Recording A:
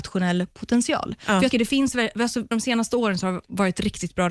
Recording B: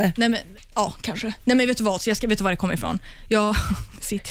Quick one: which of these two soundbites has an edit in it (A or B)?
A